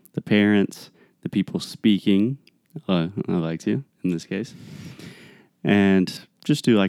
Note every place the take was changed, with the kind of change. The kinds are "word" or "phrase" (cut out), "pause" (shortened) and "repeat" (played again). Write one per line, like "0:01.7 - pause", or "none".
none